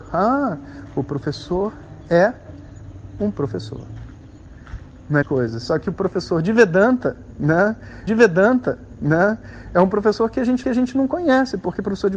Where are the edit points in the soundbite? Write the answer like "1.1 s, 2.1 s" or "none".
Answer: 5.2 s, 8.1 s, 10.6 s